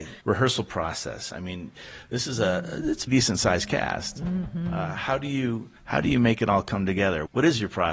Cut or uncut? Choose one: cut